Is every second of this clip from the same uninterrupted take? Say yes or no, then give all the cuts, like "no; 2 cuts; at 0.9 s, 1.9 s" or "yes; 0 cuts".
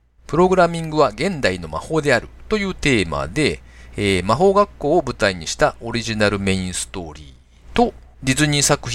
yes; 0 cuts